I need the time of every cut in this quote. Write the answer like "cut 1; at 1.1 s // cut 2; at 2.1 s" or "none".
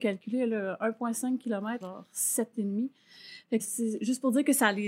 cut 1; at 1.8 s // cut 2; at 2.5 s // cut 3; at 3.6 s